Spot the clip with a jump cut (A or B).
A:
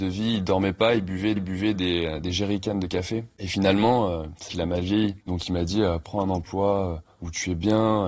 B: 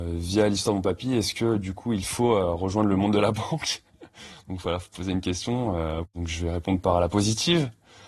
A